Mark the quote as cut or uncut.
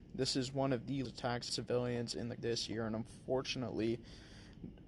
cut